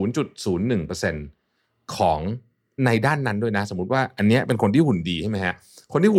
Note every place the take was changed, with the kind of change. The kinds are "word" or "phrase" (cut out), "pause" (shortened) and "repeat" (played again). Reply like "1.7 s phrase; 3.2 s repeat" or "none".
2.8 s word